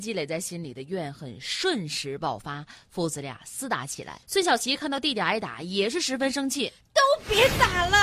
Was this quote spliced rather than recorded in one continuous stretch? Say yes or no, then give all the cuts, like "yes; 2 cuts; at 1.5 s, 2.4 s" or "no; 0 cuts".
yes; 1 cut; at 4.2 s